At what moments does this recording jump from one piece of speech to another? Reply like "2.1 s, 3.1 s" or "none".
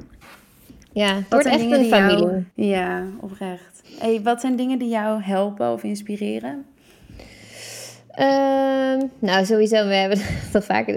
2.5 s